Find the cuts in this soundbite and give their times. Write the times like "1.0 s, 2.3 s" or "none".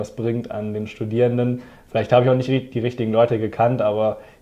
none